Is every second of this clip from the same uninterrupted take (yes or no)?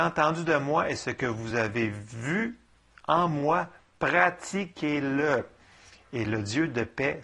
yes